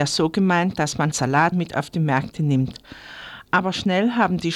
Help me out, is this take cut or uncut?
cut